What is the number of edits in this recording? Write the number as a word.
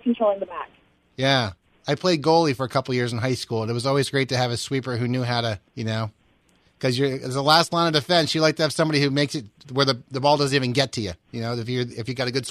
one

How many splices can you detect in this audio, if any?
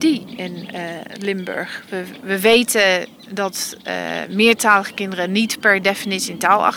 zero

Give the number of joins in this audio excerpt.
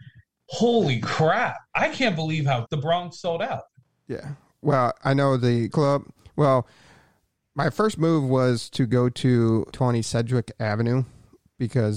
three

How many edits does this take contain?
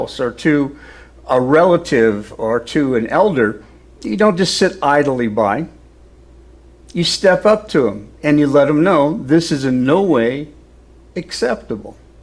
zero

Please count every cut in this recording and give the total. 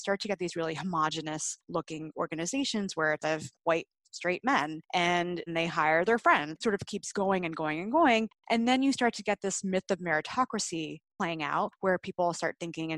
three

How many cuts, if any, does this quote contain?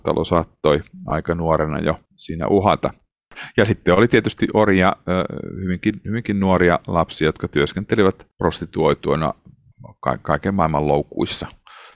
two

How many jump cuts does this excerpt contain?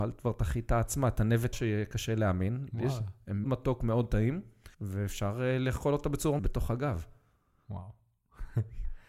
four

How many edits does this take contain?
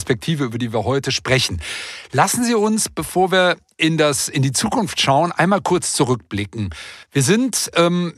one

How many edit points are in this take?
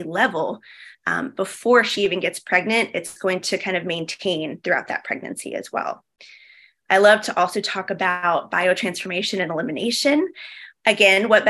zero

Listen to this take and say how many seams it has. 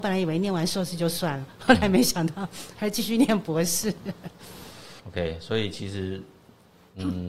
one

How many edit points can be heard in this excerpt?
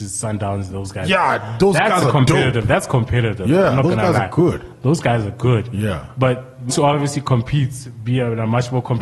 one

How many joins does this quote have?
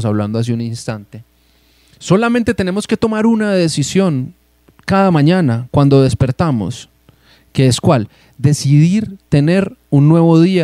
zero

